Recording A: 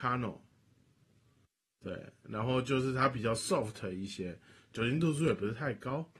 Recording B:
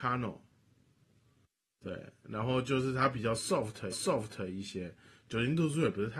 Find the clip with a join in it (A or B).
B